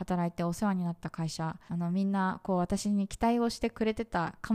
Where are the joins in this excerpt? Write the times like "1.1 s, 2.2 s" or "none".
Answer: 1.7 s